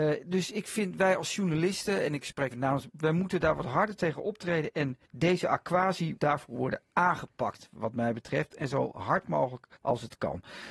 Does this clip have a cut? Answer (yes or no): yes